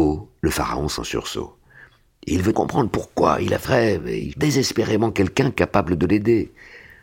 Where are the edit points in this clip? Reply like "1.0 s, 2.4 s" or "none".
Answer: 1.0 s, 2.5 s, 3.6 s, 4.3 s